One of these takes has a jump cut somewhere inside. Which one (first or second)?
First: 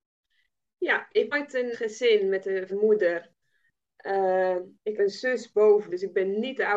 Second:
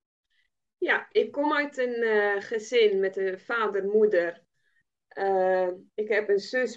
first